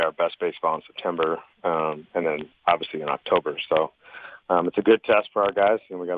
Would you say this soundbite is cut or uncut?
uncut